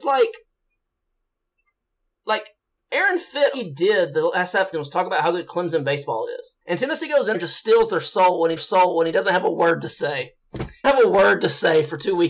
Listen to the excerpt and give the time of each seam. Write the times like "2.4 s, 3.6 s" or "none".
3.5 s, 4.7 s, 6.6 s, 7.3 s, 8.6 s, 10.8 s

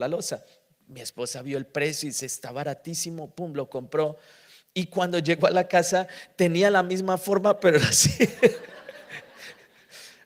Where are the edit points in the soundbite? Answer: none

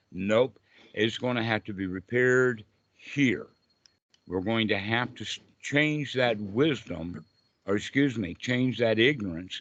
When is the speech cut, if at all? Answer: none

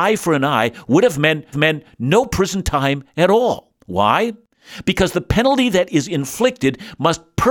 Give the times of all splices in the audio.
1.5 s

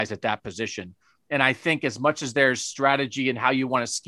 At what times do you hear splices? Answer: none

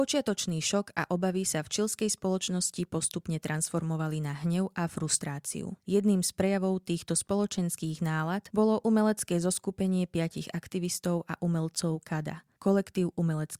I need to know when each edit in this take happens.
none

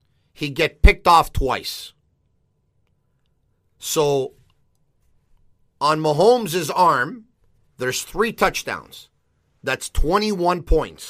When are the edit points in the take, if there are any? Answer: 7.7 s

